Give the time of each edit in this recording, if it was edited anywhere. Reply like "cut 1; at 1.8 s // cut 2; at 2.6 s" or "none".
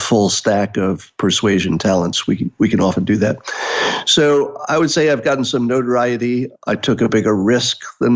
none